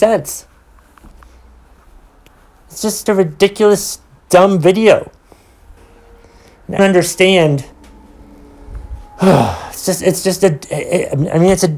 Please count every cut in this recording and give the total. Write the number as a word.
four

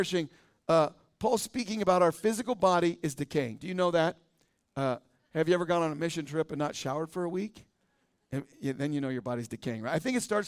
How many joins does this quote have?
zero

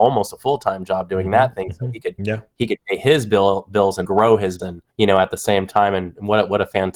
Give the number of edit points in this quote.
three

